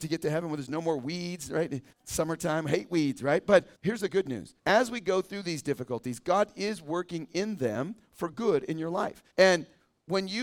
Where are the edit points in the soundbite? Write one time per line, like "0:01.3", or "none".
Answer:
0:01.9
0:03.7
0:04.6
0:09.3